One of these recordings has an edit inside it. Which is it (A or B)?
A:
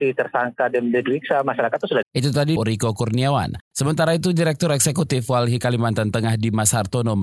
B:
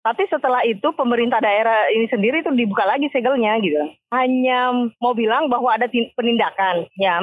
A